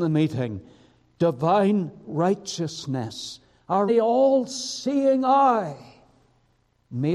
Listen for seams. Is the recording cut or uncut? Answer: cut